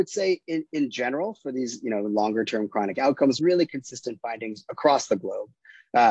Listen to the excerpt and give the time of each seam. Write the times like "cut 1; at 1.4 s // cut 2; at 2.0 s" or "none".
cut 1; at 3.4 s